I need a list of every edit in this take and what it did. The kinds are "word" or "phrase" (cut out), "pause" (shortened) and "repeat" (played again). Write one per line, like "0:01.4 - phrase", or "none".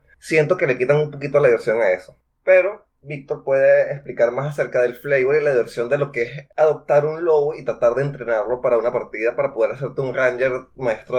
none